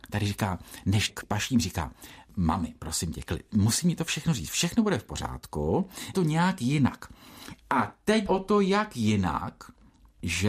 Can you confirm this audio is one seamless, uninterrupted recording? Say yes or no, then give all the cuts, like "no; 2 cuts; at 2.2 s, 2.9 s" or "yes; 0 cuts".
no; 3 cuts; at 1.1 s, 6.1 s, 8.3 s